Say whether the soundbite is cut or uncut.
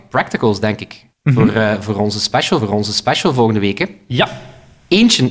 cut